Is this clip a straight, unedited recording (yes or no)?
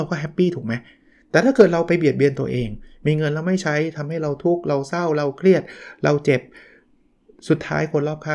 yes